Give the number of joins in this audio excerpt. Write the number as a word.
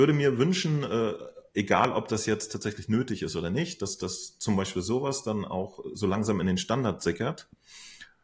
zero